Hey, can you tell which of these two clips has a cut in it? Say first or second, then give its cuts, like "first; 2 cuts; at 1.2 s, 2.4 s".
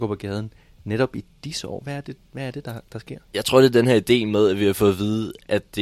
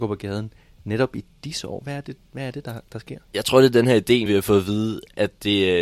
second; 1 cut; at 4.3 s